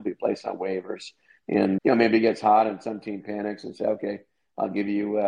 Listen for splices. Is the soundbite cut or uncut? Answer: cut